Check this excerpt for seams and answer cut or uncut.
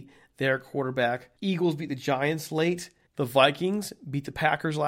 cut